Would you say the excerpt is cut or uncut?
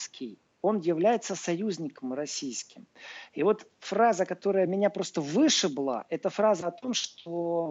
uncut